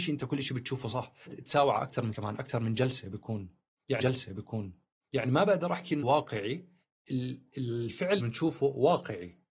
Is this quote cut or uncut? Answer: cut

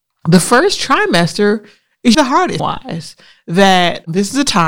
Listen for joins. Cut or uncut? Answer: cut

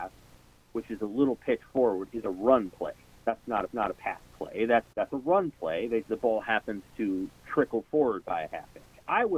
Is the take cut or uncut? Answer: cut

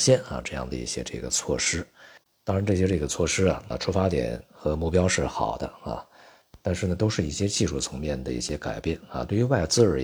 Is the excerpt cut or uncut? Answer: cut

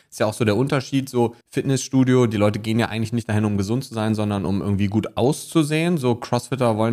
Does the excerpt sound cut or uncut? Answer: cut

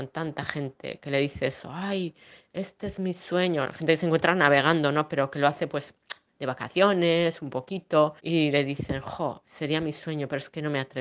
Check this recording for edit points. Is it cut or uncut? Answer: cut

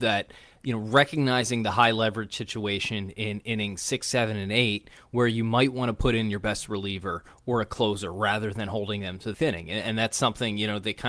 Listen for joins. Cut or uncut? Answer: cut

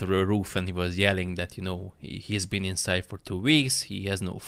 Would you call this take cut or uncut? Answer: uncut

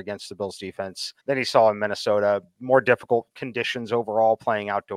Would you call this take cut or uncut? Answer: cut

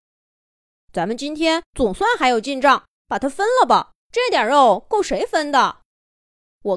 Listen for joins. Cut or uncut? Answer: cut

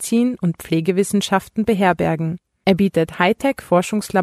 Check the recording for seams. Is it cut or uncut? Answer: uncut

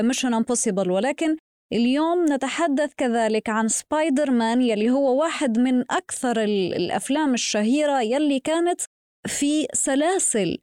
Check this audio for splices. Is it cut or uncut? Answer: uncut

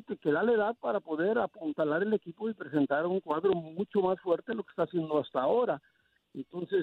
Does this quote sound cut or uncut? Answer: uncut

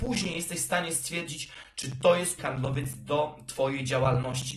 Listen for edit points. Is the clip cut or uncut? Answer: cut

